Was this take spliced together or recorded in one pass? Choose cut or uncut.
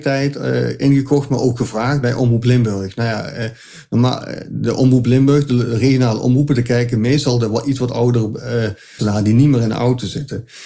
cut